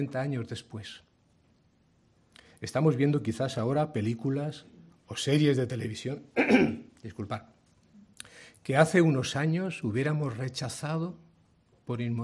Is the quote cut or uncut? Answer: uncut